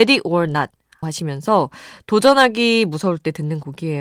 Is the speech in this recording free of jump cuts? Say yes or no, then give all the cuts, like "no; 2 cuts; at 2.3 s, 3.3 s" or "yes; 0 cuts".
no; 1 cut; at 1.0 s